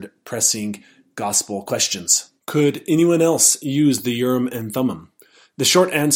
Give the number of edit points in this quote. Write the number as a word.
one